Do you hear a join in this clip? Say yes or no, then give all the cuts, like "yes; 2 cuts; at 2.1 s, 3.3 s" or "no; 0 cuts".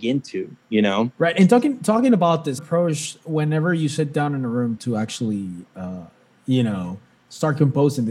yes; 3 cuts; at 1.1 s, 2.6 s, 4.8 s